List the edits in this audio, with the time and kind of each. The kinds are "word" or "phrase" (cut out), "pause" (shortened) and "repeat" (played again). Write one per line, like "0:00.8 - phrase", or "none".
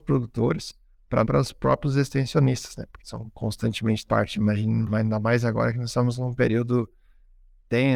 0:01.2 - phrase
0:03.0 - word
0:04.1 - phrase